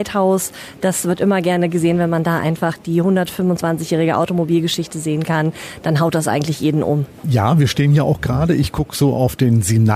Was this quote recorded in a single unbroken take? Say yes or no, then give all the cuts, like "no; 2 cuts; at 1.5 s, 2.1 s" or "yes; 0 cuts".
yes; 0 cuts